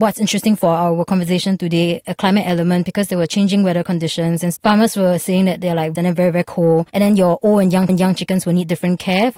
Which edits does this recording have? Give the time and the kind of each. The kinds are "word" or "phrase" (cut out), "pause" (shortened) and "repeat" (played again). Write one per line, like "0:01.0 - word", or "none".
0:04.6 - word
0:06.0 - phrase
0:06.9 - pause
0:07.9 - repeat